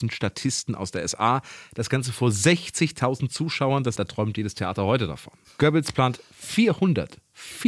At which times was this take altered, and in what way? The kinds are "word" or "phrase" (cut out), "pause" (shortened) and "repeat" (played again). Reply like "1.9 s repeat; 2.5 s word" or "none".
4.0 s phrase